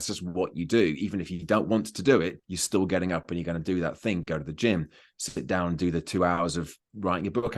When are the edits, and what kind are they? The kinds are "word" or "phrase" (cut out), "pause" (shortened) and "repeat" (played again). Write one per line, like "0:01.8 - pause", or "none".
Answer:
0:02.4 - pause

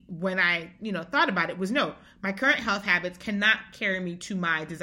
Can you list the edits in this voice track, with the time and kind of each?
none

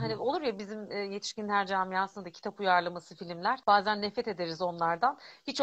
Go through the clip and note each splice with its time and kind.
0:03.6 - pause

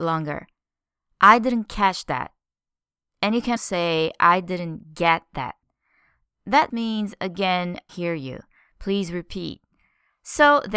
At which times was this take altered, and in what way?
0:03.6 - word
0:06.7 - word
0:07.9 - phrase

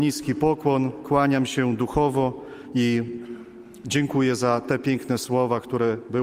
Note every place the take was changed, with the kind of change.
none

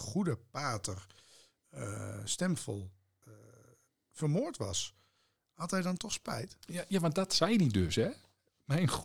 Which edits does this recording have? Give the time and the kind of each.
none

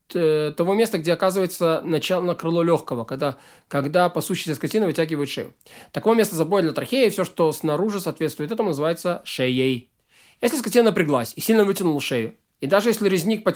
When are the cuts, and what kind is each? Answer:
none

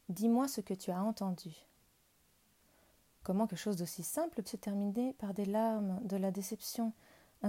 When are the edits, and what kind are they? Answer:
0:03.5 - word
0:04.4 - word

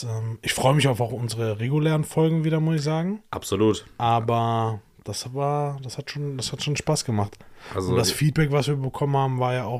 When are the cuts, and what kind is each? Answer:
none

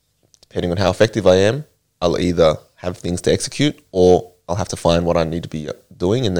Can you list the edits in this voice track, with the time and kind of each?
none

